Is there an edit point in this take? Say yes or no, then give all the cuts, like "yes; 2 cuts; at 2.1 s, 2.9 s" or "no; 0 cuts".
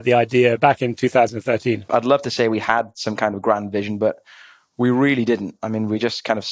no; 0 cuts